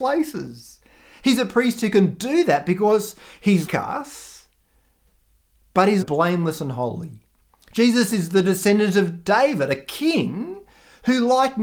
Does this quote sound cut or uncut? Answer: cut